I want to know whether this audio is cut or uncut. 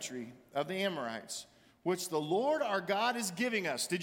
uncut